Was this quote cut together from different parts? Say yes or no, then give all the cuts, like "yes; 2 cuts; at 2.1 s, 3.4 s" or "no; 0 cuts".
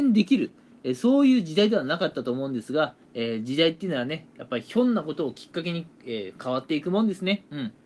yes; 1 cut; at 3.0 s